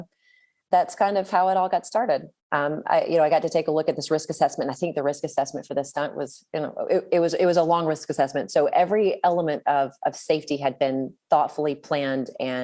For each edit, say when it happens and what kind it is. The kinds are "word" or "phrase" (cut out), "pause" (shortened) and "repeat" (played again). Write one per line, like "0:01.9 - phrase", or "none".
0:02.4 - pause